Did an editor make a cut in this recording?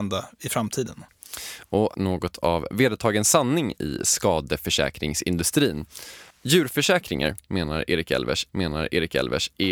yes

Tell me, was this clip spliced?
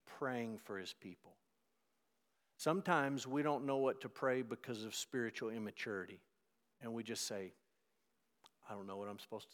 no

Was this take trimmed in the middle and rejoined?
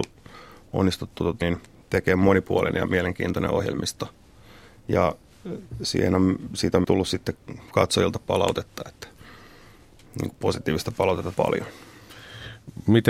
yes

